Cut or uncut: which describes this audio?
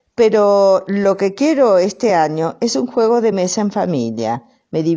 uncut